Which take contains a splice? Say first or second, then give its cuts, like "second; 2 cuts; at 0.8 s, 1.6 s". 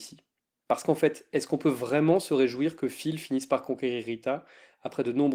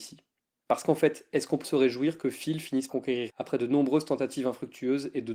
second; 3 cuts; at 1.6 s, 2.9 s, 3.3 s